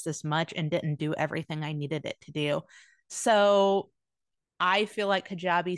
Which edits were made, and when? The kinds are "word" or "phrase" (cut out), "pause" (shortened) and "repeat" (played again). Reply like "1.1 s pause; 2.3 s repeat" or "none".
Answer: none